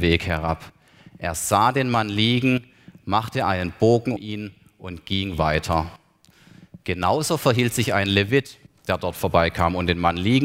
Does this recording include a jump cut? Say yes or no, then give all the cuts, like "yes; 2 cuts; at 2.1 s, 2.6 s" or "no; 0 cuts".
yes; 2 cuts; at 4.2 s, 8.7 s